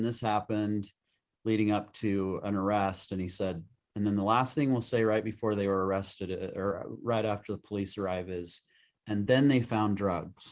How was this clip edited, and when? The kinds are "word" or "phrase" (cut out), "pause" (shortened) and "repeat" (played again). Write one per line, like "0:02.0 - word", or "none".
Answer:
none

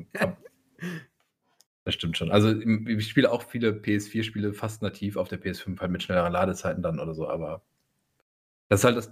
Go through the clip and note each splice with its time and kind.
none

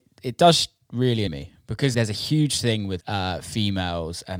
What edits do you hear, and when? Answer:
0:01.3 - word
0:01.9 - word
0:03.0 - word

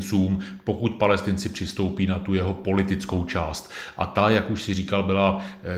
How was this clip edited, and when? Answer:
none

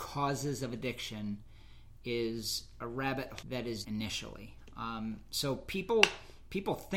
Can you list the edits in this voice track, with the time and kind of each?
0:02.8 - phrase
0:03.4 - word
0:03.8 - phrase

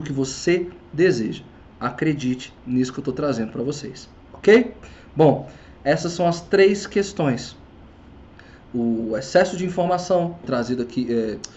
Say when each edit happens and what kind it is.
0:10.4 - phrase

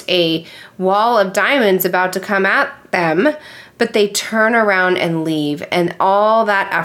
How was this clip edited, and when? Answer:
none

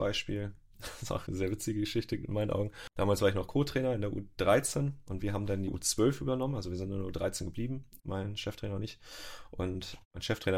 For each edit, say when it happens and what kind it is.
0:01.3 - word
0:05.7 - word
0:08.0 - pause

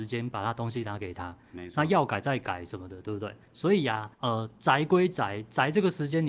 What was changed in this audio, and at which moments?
0:04.1 - pause

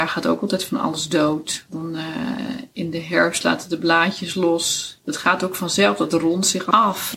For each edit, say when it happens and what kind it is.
none

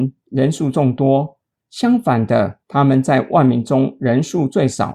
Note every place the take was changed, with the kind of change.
0:02.6 - pause

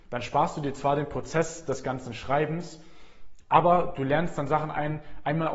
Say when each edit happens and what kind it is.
none

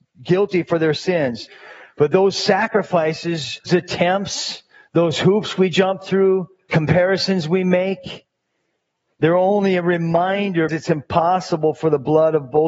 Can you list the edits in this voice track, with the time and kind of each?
0:03.7 - word
0:06.7 - word
0:10.7 - word

